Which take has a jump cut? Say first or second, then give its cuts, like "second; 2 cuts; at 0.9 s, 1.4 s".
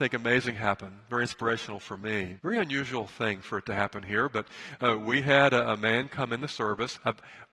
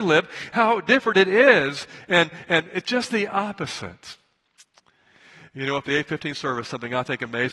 first; 1 cut; at 2.4 s